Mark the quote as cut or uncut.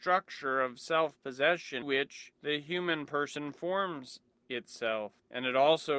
cut